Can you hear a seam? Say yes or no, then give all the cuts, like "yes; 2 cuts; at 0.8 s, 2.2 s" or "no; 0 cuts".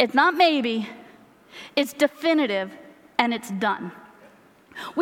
no; 0 cuts